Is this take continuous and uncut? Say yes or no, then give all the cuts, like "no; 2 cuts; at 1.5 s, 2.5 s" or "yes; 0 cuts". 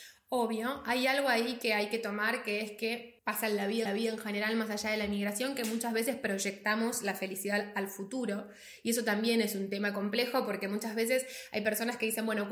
no; 2 cuts; at 3.2 s, 3.9 s